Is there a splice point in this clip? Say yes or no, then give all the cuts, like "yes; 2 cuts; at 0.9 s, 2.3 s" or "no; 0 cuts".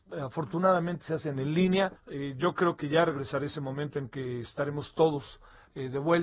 yes; 1 cut; at 2.0 s